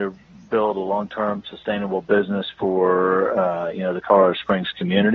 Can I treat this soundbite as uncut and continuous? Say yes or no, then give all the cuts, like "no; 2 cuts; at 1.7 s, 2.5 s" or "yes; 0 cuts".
yes; 0 cuts